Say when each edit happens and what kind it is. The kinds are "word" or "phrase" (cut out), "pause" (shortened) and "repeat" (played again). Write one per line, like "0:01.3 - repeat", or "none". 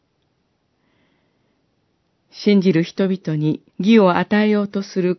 0:03.7 - pause